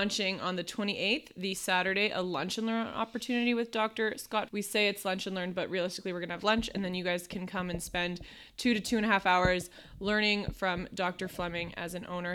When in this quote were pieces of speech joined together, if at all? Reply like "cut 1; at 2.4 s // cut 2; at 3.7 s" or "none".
cut 1; at 4.5 s